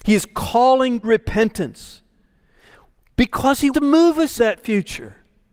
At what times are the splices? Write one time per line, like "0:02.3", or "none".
0:01.0
0:03.7
0:04.4